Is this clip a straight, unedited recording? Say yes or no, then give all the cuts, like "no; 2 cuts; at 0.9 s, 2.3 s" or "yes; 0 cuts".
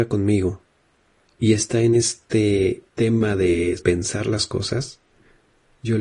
no; 2 cuts; at 2.9 s, 3.8 s